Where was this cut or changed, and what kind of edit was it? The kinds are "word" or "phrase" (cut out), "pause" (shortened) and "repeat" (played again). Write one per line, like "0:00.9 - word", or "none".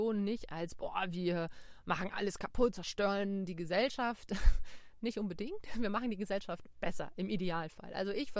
0:02.7 - word